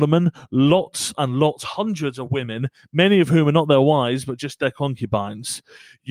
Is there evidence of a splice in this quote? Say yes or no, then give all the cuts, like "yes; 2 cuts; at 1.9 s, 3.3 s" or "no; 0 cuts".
no; 0 cuts